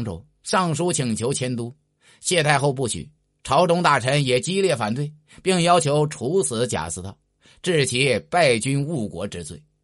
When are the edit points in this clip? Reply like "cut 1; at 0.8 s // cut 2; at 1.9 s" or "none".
none

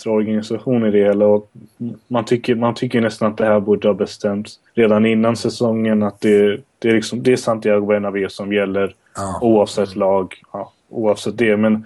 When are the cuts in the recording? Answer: cut 1; at 4.7 s // cut 2; at 10.4 s

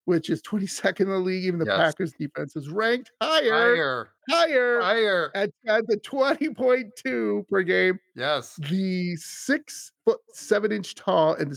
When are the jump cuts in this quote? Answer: cut 1; at 4.2 s // cut 2; at 10.0 s

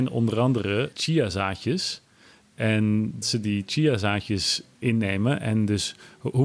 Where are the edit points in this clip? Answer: cut 1; at 0.9 s // cut 2; at 3.2 s // cut 3; at 4.7 s

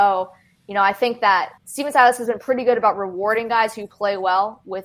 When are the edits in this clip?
cut 1; at 1.6 s

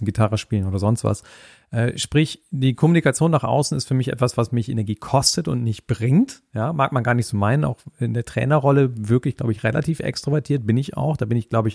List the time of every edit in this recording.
none

